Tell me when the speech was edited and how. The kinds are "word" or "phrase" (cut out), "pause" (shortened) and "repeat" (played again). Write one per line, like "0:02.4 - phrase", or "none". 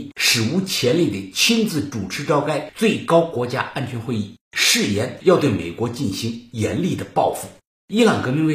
none